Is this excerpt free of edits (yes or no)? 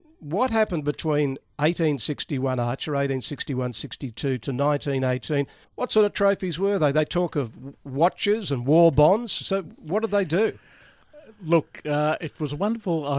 no